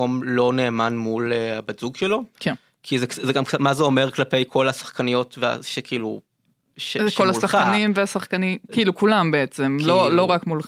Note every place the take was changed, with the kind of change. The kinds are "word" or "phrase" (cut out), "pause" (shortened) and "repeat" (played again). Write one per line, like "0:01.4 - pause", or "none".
none

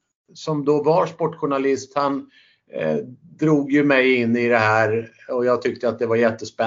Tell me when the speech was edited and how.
none

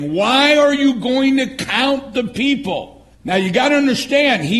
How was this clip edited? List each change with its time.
0:03.1 - pause

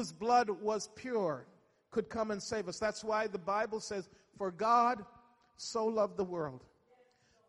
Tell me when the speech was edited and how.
none

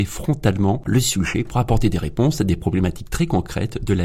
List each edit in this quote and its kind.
none

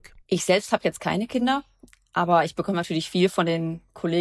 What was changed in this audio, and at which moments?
none

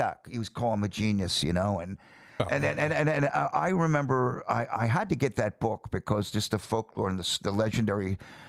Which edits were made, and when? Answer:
none

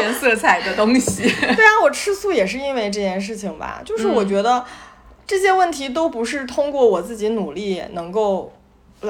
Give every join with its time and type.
none

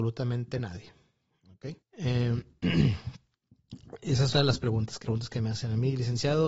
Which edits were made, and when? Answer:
0:01.8 - pause
0:04.3 - word
0:05.0 - word

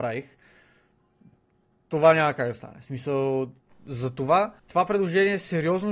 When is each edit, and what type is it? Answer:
0:03.6 - pause
0:04.6 - pause

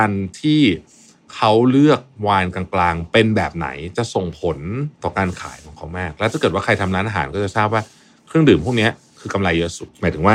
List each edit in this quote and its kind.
0:04.9 - pause

